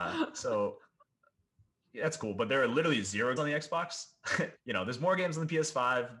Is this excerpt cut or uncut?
cut